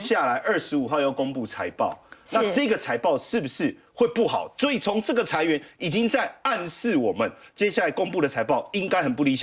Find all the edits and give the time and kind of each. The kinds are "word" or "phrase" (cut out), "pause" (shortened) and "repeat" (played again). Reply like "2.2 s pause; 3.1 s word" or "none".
none